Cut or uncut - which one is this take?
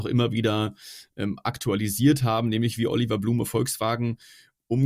uncut